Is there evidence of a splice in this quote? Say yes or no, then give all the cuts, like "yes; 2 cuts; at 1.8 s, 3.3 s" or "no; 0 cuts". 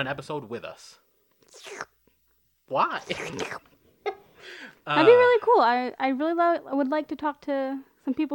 no; 0 cuts